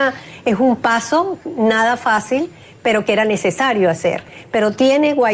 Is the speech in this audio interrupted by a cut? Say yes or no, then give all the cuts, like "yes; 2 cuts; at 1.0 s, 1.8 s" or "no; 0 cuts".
no; 0 cuts